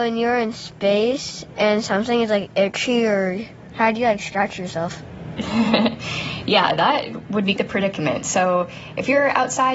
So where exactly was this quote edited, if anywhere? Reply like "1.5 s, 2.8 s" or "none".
7.6 s